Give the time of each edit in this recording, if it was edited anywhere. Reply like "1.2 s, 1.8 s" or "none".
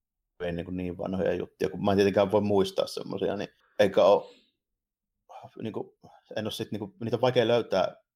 3.6 s

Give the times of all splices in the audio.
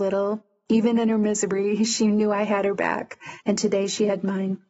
3.4 s

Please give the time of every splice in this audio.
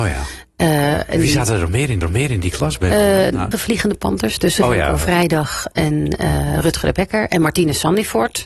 2.0 s, 3.5 s

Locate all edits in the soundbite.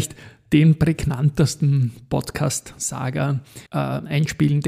3.7 s

